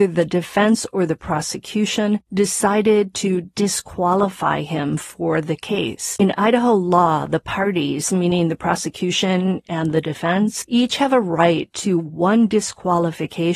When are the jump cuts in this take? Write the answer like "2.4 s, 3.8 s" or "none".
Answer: none